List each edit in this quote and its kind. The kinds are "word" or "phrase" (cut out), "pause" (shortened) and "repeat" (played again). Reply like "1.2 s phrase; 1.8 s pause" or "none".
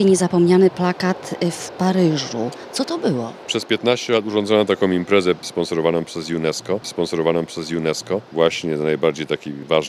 6.8 s repeat